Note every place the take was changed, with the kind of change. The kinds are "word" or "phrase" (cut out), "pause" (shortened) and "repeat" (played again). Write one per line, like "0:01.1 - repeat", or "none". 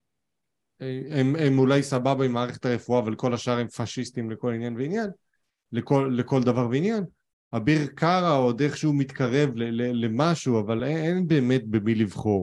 none